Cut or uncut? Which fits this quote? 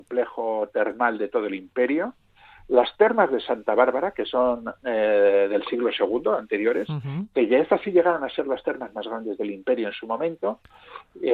uncut